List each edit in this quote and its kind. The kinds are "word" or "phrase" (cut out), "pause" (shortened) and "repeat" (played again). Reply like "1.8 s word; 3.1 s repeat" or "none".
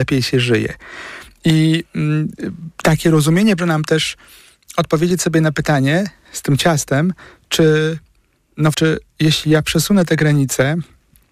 3.6 s word; 8.7 s word

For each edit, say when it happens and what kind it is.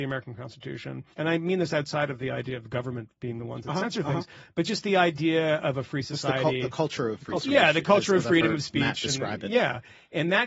1.1 s pause

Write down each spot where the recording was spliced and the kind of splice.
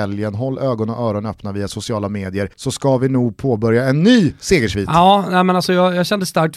2.5 s pause

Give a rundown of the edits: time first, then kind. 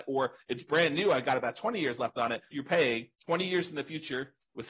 2.5 s phrase; 3.1 s pause

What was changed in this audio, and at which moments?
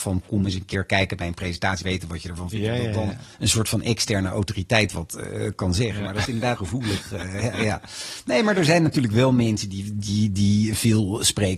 1.8 s phrase; 3.3 s pause; 6.2 s word; 6.6 s word; 7.4 s word

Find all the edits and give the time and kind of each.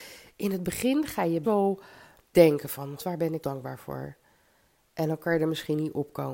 1.4 s word; 2.3 s word; 3.0 s word; 3.4 s word

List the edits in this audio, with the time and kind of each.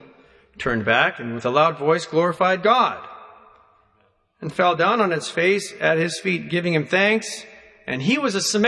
none

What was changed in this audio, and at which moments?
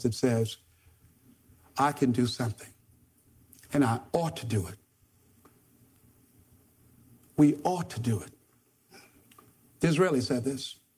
none

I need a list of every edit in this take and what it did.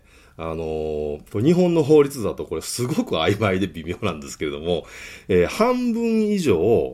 1.3 s pause

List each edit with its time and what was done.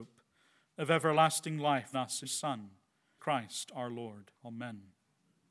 1.9 s phrase; 2.2 s word; 3.2 s word; 4.4 s pause

